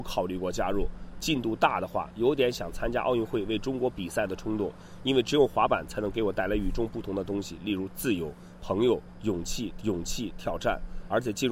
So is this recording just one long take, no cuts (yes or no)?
no